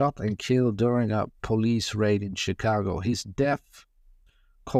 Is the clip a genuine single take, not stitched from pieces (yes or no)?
yes